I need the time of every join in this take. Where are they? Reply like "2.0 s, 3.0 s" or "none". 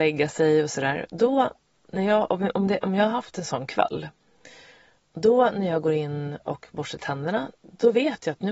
none